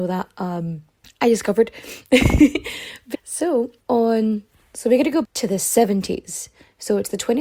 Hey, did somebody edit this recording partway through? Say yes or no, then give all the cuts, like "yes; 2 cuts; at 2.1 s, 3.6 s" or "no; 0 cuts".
yes; 4 cuts; at 1.0 s, 3.1 s, 3.8 s, 5.2 s